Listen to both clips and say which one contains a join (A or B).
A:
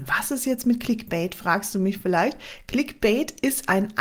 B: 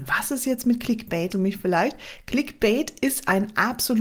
B